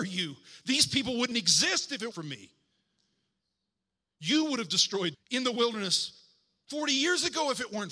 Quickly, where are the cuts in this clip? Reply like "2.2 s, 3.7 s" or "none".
1.3 s, 2.1 s, 5.1 s